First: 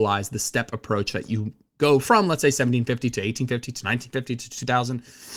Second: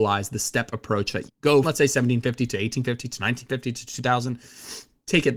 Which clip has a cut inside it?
second; 2 cuts; at 1.3 s, 1.6 s

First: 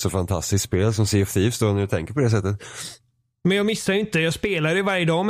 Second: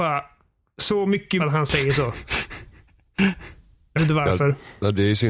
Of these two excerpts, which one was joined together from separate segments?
second; 2 cuts; at 1.4 s, 4.0 s

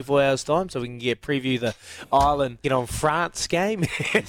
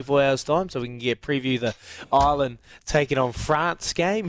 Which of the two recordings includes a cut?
first; 1 cut; at 2.6 s

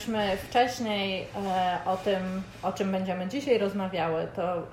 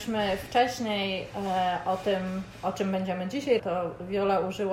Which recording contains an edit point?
second; 1 cut; at 3.6 s

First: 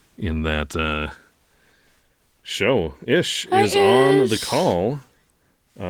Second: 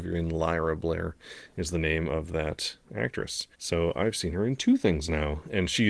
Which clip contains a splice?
second; 1 cut; at 3.5 s

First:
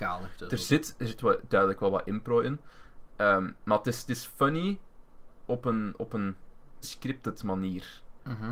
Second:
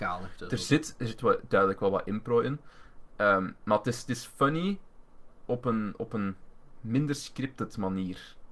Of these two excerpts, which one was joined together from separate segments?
first; 1 cut; at 6.8 s

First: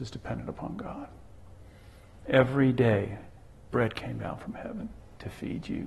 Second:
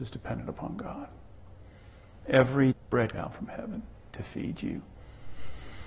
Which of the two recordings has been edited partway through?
second; 2 cuts; at 2.7 s, 3.1 s

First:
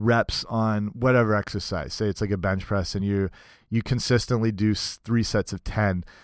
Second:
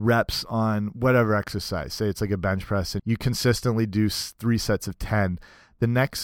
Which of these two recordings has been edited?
second; 1 cut; at 3.0 s

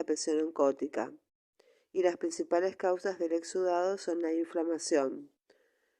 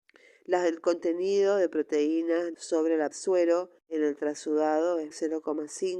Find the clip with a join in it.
second; 4 cuts; at 2.5 s, 3.1 s, 3.8 s, 5.1 s

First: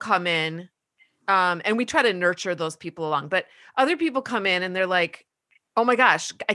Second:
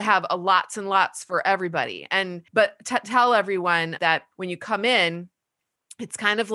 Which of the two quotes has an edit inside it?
second; 3 cuts; at 2.5 s, 4.0 s, 4.3 s

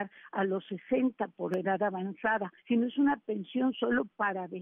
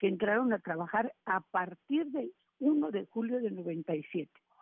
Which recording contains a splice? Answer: first; 1 cut; at 2.6 s

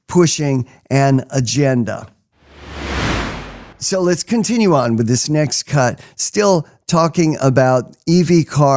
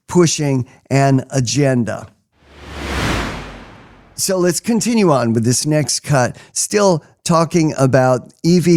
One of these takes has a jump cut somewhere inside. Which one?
first; 1 cut; at 3.7 s

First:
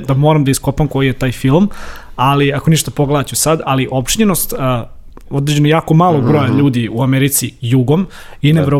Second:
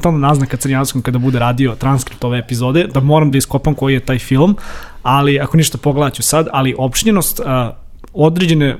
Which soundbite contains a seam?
first; 1 cut; at 5.2 s

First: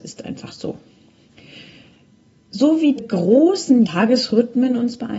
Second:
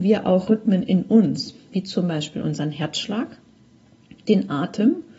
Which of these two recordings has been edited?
first; 2 cuts; at 3.0 s, 3.8 s

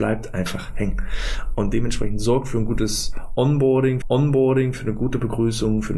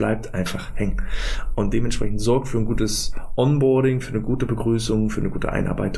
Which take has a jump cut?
first; 1 cut; at 4.0 s

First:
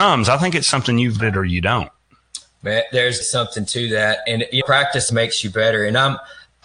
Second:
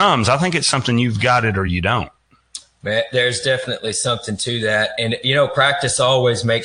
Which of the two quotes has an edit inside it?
first; 4 cuts; at 1.2 s, 3.2 s, 4.6 s, 5.1 s

